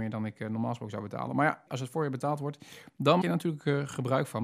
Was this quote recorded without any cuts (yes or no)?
no